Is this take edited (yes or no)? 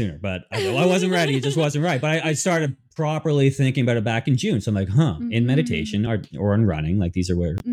no